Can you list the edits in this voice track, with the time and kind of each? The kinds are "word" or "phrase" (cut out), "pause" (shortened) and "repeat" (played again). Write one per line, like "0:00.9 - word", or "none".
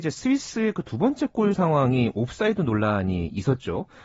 none